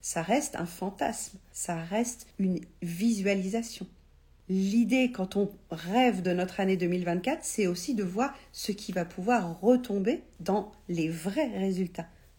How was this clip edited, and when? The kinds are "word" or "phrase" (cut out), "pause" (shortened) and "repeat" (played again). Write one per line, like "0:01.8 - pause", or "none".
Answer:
none